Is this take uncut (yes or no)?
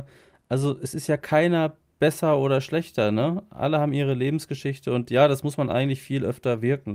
yes